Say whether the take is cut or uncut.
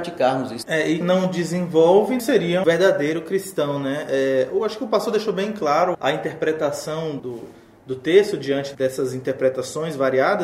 cut